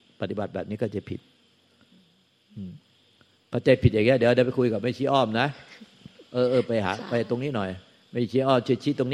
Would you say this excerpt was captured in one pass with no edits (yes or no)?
yes